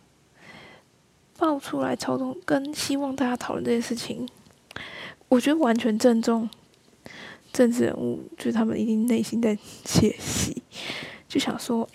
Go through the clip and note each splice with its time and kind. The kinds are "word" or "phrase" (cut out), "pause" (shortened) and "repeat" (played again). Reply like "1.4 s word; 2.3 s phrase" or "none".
5.2 s pause; 7.4 s pause